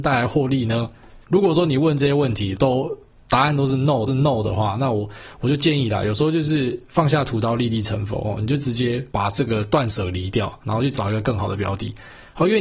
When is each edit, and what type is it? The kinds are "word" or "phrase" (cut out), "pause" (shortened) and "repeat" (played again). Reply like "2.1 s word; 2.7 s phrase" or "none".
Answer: 1.2 s pause; 2.5 s phrase; 4.1 s repeat; 9.1 s pause